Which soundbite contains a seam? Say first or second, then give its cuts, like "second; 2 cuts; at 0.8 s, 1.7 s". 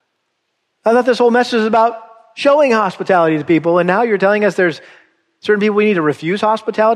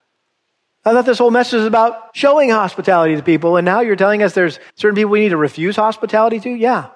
second; 2 cuts; at 2.1 s, 4.7 s